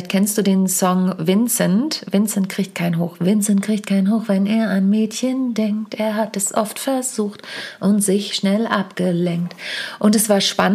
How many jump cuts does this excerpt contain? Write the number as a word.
zero